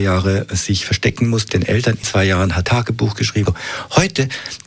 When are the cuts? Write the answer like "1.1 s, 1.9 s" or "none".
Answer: 1.5 s, 2.0 s, 2.6 s, 3.5 s